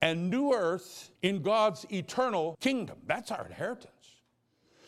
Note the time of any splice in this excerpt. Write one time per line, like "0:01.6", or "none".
0:01.2
0:02.5